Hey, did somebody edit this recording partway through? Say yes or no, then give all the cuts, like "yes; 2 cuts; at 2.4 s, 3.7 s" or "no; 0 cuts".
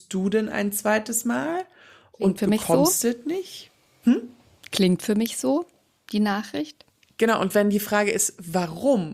no; 0 cuts